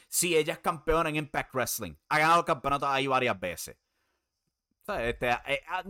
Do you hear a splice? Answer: no; 0 cuts

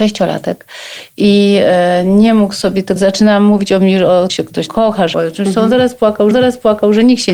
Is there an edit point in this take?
yes; 5 cuts; at 3.0 s, 4.3 s, 4.7 s, 5.1 s, 6.3 s

